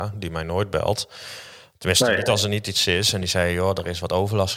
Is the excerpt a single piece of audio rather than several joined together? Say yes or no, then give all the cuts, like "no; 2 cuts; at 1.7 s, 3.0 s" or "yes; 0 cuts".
yes; 0 cuts